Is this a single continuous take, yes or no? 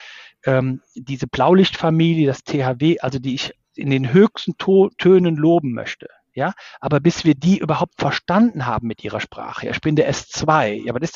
yes